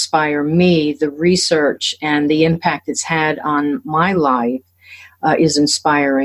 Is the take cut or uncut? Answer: uncut